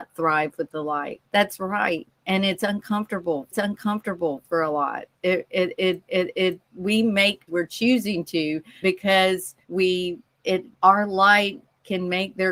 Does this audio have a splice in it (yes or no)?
yes